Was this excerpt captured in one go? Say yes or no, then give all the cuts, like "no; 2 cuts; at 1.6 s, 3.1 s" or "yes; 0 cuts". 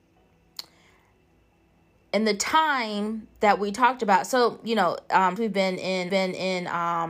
no; 3 cuts; at 3.4 s, 5.4 s, 6.1 s